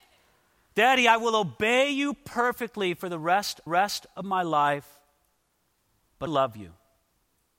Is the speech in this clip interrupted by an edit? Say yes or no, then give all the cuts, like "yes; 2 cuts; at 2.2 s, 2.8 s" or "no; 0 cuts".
yes; 2 cuts; at 3.7 s, 6.3 s